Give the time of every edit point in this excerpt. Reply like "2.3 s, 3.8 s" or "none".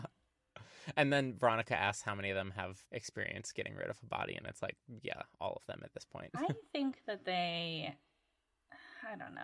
2.8 s